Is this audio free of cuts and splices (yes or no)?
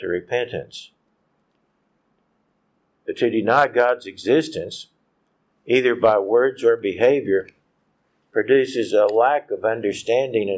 yes